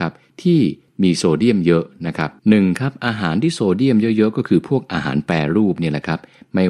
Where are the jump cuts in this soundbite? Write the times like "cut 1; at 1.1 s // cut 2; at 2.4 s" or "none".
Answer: cut 1; at 2.4 s